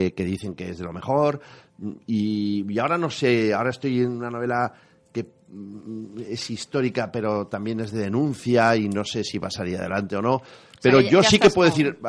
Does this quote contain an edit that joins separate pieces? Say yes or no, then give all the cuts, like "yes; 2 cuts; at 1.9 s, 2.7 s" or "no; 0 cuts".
no; 0 cuts